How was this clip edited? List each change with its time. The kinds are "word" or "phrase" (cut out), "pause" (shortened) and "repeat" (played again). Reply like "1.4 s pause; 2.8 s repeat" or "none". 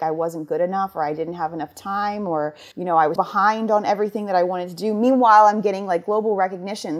2.7 s pause; 3.2 s word